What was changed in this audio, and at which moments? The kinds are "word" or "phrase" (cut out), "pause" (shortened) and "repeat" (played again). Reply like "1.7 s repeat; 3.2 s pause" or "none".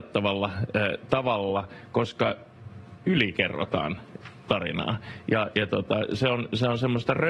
5.5 s word